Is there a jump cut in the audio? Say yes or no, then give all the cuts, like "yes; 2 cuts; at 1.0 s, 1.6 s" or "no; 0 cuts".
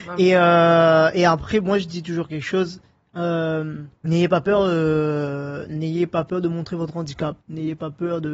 yes; 2 cuts; at 4.0 s, 7.4 s